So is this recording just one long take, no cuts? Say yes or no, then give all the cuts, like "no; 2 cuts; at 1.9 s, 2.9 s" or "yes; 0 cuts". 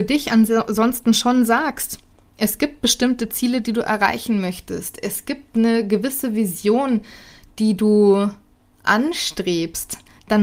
yes; 0 cuts